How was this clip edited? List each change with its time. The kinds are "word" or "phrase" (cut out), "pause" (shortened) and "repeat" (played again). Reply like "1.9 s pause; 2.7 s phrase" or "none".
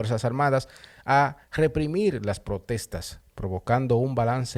1.4 s pause